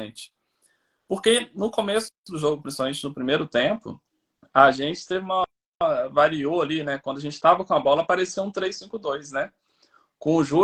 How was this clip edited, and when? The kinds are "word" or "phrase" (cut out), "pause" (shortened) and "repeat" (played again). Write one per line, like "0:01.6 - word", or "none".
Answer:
none